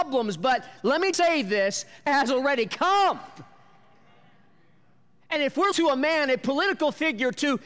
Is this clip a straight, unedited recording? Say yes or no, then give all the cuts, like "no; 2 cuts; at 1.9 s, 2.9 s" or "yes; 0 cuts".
no; 3 cuts; at 1.1 s, 2.1 s, 5.7 s